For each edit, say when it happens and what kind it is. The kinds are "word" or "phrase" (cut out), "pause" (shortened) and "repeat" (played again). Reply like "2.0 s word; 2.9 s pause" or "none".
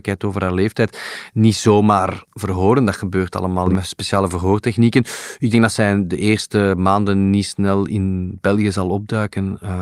2.3 s pause